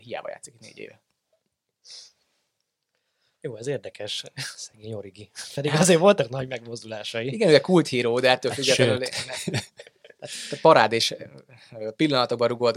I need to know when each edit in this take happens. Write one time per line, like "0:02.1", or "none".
none